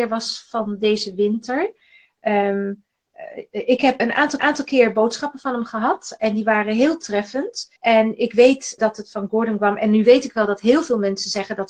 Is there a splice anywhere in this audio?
yes; 4 cuts; at 4.0 s, 4.4 s, 7.8 s, 8.8 s

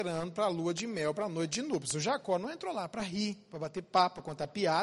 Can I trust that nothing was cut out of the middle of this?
yes; 0 cuts

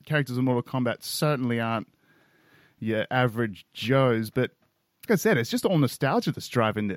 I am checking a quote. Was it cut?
yes; 1 cut; at 5.1 s

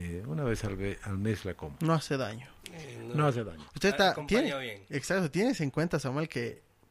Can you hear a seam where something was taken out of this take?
no; 0 cuts

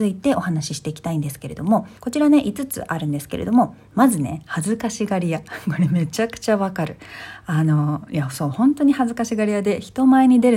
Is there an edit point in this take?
yes; 1 cut; at 2.0 s

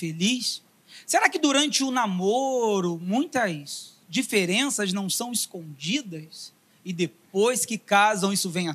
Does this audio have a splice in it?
no; 0 cuts

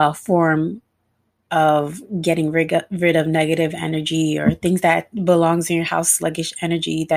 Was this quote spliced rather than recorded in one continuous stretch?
no; 0 cuts

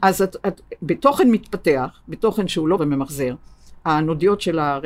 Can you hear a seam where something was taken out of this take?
yes; 1 cut; at 2.8 s

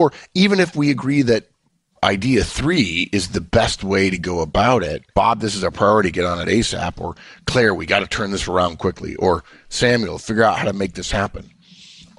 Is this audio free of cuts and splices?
no; 1 cut; at 5.1 s

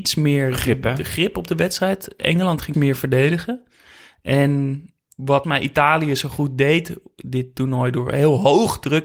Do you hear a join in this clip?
yes; 2 cuts; at 2.7 s, 5.4 s

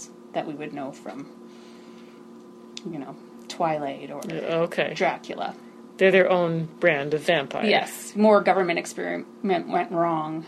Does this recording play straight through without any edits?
yes; 0 cuts

